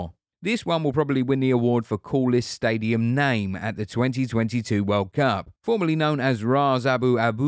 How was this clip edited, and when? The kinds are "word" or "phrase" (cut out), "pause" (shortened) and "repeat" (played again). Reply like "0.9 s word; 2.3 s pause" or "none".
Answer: 5.5 s pause